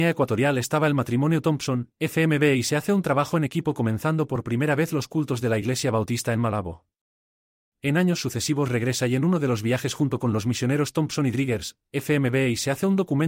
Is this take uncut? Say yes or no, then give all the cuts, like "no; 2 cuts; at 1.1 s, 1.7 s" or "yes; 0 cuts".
yes; 0 cuts